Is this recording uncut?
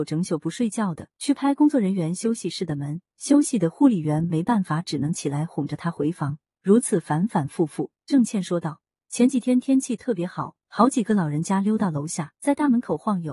no; 3 cuts; at 1.1 s, 3.1 s, 12.4 s

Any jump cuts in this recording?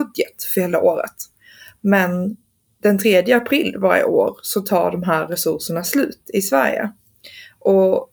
no; 0 cuts

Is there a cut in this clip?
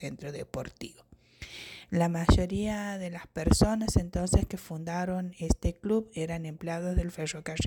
no; 0 cuts

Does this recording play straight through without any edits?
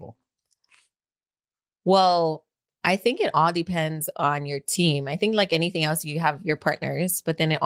yes; 0 cuts

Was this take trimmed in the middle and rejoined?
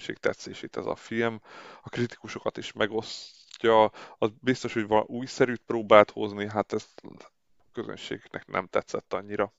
no; 0 cuts

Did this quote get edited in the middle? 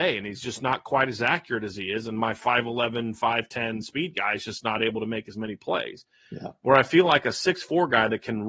no; 0 cuts

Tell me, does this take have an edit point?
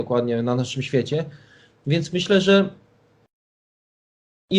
no; 0 cuts

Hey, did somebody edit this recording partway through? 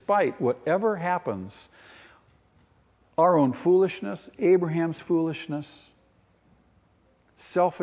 no; 0 cuts

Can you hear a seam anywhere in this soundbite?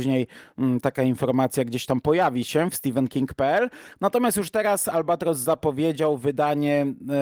no; 0 cuts

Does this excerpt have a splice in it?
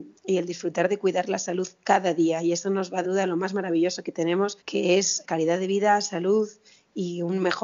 yes; 3 cuts; at 3.0 s, 4.6 s, 5.2 s

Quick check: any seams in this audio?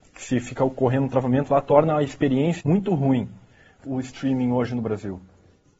yes; 2 cuts; at 2.6 s, 3.8 s

